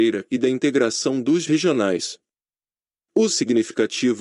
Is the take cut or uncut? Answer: cut